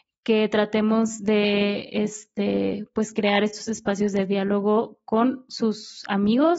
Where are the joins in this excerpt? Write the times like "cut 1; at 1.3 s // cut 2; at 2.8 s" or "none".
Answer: none